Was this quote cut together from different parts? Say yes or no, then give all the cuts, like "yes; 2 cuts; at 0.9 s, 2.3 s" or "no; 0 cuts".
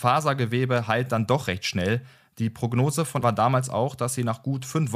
yes; 1 cut; at 3.2 s